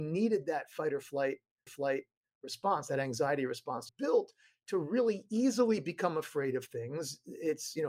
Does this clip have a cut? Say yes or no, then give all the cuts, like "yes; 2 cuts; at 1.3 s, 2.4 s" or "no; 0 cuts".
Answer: yes; 2 cuts; at 1.7 s, 3.9 s